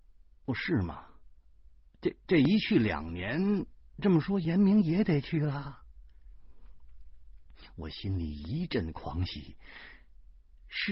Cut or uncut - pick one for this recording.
uncut